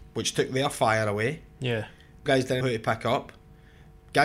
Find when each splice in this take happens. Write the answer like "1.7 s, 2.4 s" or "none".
2.3 s, 2.6 s